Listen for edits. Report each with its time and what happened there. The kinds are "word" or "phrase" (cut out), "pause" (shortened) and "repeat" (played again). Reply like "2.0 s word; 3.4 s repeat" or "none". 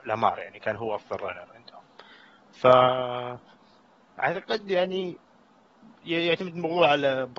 none